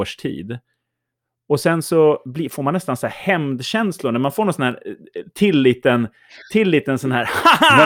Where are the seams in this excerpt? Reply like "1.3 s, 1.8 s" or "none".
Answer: 2.2 s